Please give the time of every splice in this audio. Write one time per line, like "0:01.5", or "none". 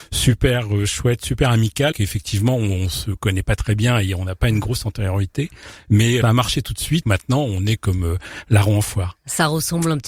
0:01.9
0:06.2
0:07.0